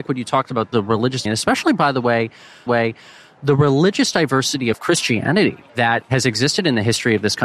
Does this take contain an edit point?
yes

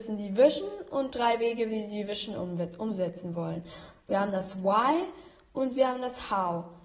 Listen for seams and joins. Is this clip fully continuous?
yes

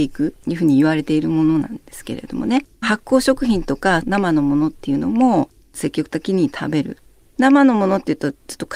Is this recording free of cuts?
no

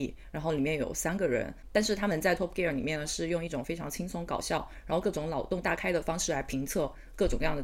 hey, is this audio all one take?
yes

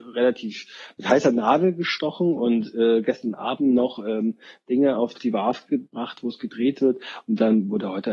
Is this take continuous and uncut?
yes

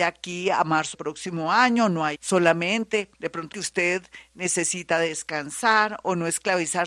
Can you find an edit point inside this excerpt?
yes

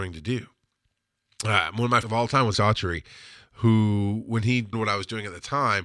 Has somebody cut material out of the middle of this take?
yes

